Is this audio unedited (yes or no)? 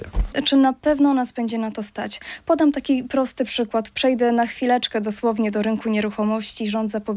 yes